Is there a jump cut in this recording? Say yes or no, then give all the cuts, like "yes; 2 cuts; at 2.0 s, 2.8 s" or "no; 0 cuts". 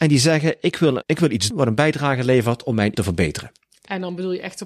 yes; 3 cuts; at 1.0 s, 1.5 s, 2.9 s